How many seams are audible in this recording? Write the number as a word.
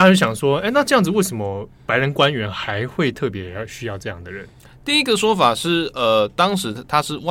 zero